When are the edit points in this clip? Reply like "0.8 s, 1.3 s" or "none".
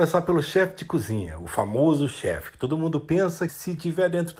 3.5 s

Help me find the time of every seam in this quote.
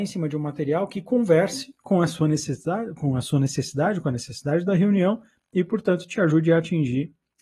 none

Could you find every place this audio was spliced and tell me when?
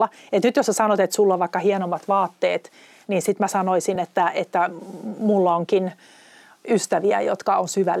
none

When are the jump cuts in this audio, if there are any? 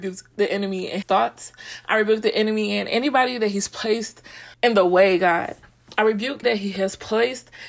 1.0 s, 4.5 s, 6.4 s

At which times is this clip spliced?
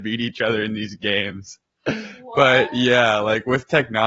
none

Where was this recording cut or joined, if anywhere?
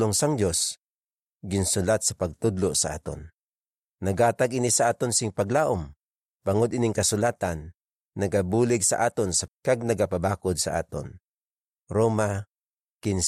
9.5 s

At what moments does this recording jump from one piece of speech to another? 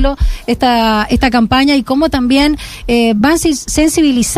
none

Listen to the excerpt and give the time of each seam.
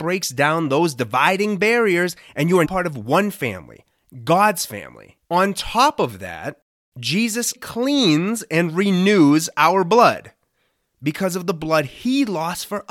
2.6 s, 5.2 s, 7.6 s

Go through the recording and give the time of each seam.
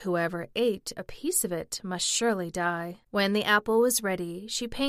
3.0 s

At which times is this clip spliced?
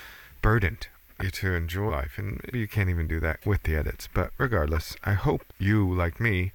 1.2 s, 1.9 s, 2.5 s, 5.5 s

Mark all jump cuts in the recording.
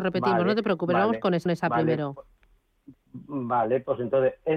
1.5 s

